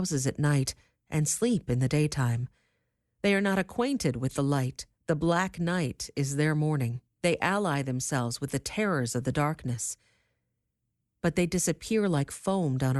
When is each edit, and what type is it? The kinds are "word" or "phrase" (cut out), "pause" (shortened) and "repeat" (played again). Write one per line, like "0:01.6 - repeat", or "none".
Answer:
0:04.9 - pause
0:07.1 - pause